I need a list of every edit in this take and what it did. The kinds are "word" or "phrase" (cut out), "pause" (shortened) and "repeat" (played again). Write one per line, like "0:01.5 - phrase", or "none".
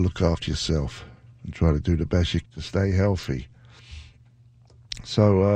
0:01.3 - word
0:02.4 - word